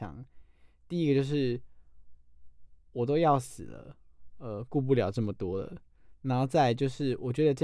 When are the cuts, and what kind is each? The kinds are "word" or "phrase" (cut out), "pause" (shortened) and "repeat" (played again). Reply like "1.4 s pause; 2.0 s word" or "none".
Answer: none

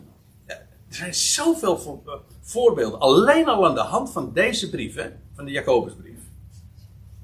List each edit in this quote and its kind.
none

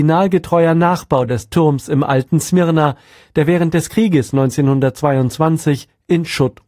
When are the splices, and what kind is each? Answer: none

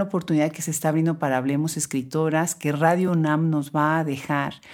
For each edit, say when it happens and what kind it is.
none

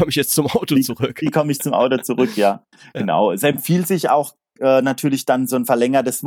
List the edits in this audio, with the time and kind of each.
none

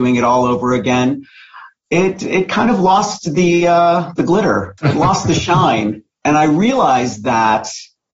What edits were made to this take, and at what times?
4.8 s pause

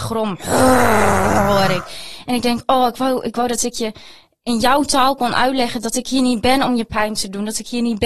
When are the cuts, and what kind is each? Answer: none

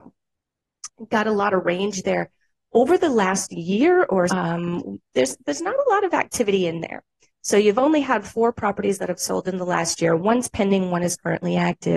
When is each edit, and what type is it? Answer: 4.3 s word

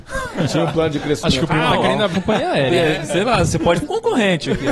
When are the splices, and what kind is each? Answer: 2.1 s word; 3.8 s phrase

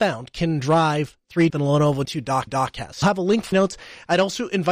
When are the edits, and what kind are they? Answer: 1.5 s phrase; 2.0 s word; 2.5 s repeat; 3.0 s word; 3.5 s phrase

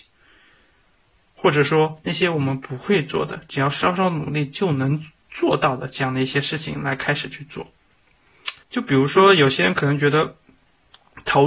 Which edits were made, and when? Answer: 8.6 s pause

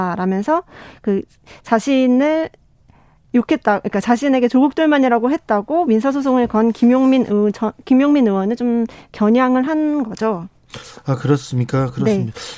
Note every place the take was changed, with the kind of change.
none

